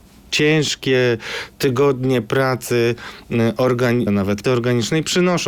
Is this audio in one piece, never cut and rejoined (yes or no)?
no